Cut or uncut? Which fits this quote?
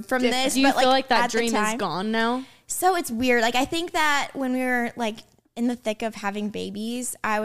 uncut